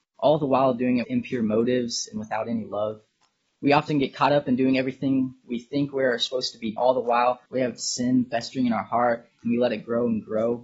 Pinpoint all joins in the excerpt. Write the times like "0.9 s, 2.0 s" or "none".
1.0 s, 3.5 s, 6.8 s, 7.5 s